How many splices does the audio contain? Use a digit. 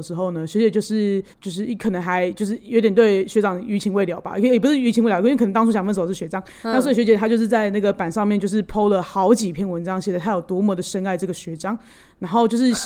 1